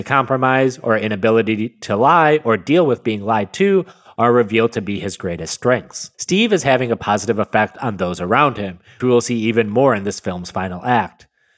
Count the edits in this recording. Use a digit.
2